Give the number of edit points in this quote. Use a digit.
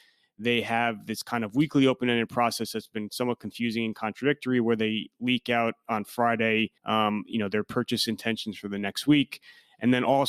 1